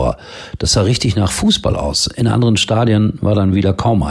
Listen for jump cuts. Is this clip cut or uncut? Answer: uncut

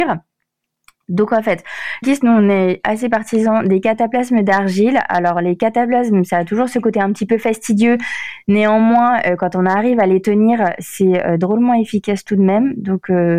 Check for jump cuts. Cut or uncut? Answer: cut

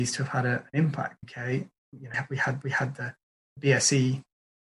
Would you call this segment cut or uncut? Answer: cut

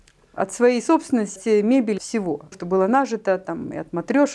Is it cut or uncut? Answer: cut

